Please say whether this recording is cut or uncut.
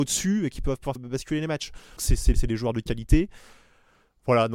cut